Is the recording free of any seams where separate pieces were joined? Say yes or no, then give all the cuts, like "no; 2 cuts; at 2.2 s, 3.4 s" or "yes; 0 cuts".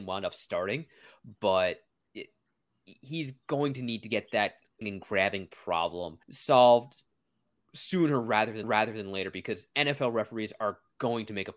no; 3 cuts; at 4.8 s, 6.2 s, 8.6 s